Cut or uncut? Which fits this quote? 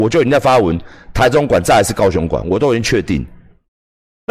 uncut